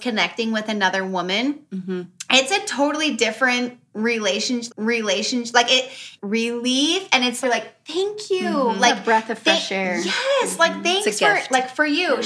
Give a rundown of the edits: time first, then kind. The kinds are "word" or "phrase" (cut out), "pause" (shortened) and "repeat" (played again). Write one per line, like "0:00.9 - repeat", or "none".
0:04.7 - repeat
0:06.2 - phrase
0:07.4 - word